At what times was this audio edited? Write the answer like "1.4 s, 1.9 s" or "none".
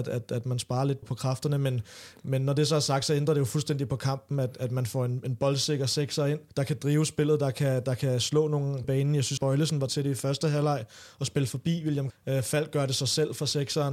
1.0 s, 6.5 s, 8.8 s, 9.4 s, 9.9 s, 12.1 s